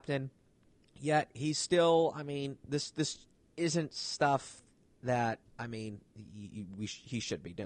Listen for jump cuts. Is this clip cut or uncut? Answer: cut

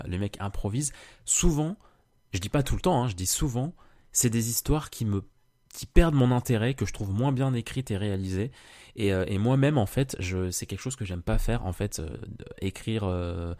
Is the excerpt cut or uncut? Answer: uncut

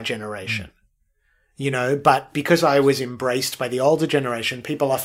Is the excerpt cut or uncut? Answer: uncut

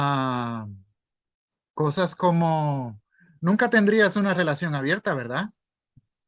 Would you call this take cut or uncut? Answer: uncut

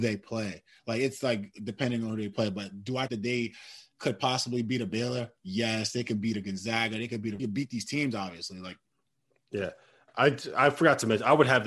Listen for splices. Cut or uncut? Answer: cut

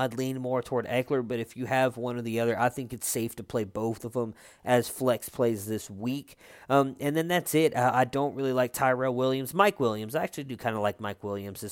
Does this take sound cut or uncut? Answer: uncut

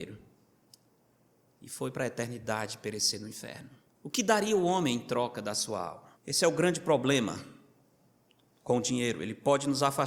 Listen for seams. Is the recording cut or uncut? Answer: cut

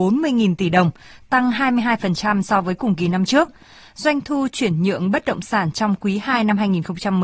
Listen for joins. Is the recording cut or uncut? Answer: uncut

